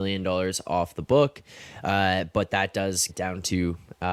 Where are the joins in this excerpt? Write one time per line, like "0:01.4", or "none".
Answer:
0:03.1

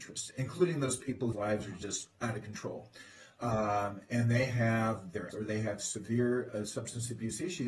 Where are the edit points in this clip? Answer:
0:01.3
0:02.1
0:05.3

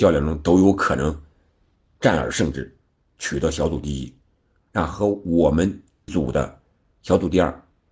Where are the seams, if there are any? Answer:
0:06.1

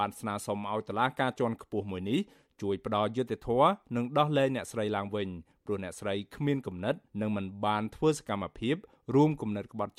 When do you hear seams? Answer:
none

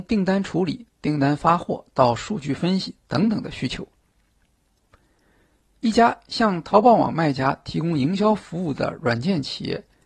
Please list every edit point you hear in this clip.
none

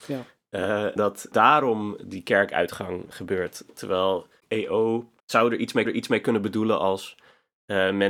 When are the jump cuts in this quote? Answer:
0:01.0
0:01.3
0:03.1
0:04.4
0:05.2
0:05.8

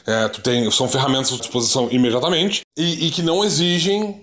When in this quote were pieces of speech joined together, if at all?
0:01.4
0:02.7

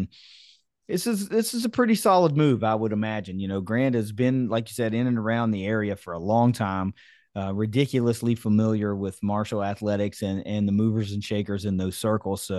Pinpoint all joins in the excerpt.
none

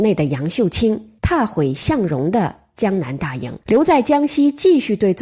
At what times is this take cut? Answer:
0:01.2
0:03.6

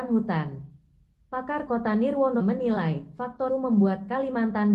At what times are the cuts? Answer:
0:01.7
0:02.4
0:03.5

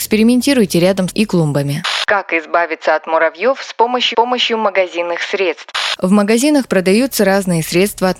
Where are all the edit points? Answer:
0:01.1
0:04.1

